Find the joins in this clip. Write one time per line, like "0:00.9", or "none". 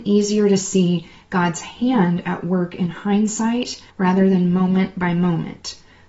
0:03.9